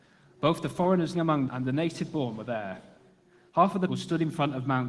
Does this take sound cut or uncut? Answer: cut